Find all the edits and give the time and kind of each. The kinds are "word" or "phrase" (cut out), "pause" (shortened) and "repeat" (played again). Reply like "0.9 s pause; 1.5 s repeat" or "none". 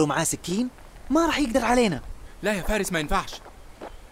none